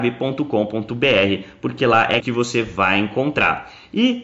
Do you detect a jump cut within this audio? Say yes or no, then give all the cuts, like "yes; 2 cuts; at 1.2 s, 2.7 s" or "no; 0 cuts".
yes; 1 cut; at 2.2 s